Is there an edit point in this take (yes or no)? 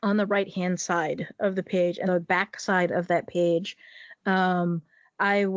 yes